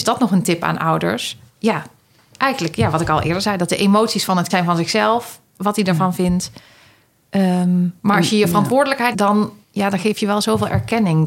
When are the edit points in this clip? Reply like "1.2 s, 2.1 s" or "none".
1.5 s, 4.5 s, 8.0 s, 9.1 s, 9.6 s